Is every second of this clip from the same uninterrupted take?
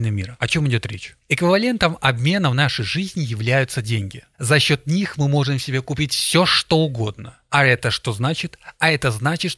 yes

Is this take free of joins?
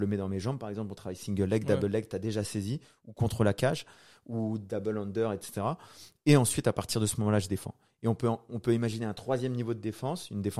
yes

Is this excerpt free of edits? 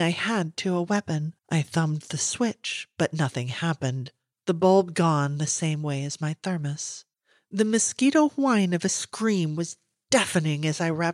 no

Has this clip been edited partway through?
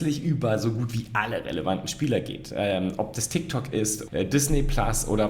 yes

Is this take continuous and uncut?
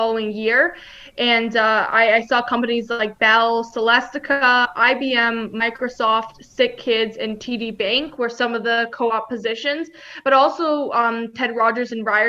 yes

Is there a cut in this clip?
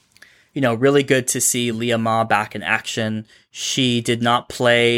no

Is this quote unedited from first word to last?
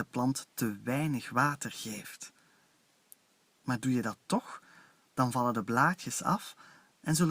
yes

